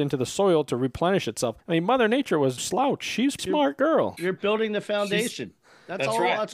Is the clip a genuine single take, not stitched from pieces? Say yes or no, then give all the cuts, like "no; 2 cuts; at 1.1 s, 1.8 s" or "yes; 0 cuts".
no; 4 cuts; at 1.6 s, 2.6 s, 3.4 s, 4.2 s